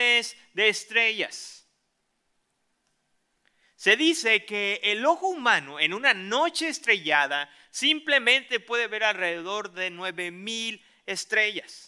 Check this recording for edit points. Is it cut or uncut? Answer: uncut